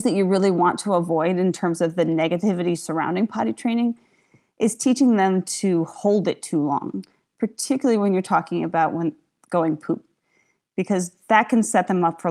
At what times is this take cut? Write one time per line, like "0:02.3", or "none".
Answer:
none